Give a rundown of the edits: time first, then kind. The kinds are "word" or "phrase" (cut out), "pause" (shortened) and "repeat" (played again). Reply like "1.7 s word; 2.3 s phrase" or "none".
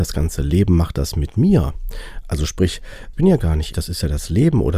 3.1 s word; 3.7 s word

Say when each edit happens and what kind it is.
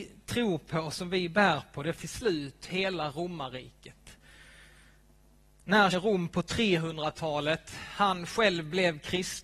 2.0 s word; 5.9 s word

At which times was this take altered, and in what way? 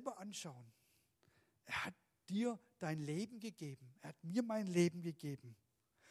none

